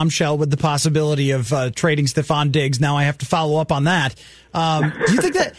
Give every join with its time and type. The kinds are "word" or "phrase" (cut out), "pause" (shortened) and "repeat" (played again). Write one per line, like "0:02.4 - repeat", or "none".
none